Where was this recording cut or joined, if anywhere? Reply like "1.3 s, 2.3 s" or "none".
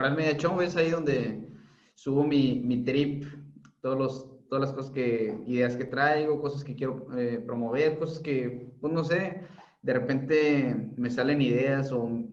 none

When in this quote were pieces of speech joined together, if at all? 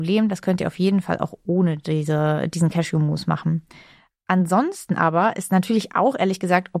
none

